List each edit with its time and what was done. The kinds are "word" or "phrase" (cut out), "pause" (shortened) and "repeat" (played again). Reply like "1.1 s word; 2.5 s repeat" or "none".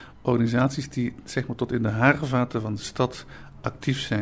none